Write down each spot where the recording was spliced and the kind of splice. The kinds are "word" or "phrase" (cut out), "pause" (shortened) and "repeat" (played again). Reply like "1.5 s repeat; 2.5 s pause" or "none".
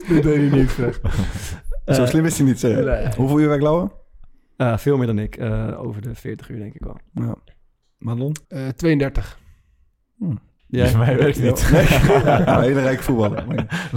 8.4 s pause; 10.6 s pause

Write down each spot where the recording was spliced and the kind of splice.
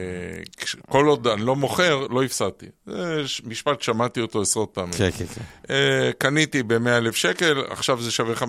none

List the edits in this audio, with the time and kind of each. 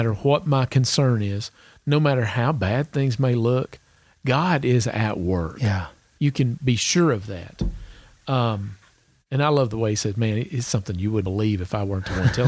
11.2 s word

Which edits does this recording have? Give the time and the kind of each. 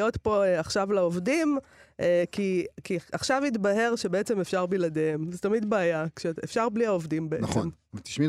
none

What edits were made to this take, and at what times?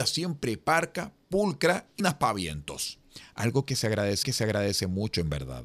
2.0 s word; 4.2 s repeat

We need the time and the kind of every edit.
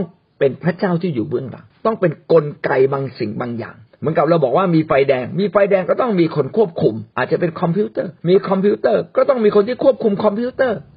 1.7 s pause; 3.9 s pause; 7.1 s pause; 8.2 s pause

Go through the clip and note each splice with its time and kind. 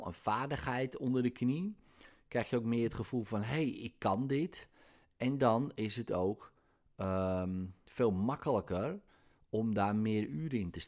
none

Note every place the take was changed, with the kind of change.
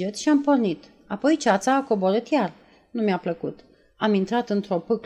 none

